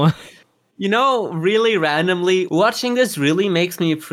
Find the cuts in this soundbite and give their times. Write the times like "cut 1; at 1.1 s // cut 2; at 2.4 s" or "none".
none